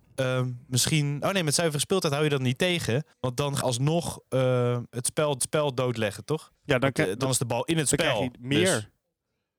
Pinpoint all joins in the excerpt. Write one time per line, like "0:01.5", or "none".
0:01.2
0:03.1
0:03.6
0:04.9
0:05.4
0:06.6